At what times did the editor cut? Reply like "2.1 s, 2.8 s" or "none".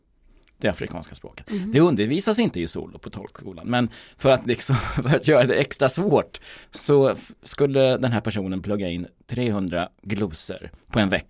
6.6 s